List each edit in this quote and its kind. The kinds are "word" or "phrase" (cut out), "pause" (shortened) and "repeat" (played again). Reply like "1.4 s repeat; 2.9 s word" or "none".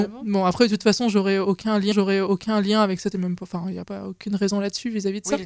1.9 s repeat; 3.1 s phrase; 3.8 s word